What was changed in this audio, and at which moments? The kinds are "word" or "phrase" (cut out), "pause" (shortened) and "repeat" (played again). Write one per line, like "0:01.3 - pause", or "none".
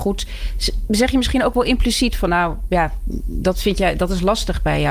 none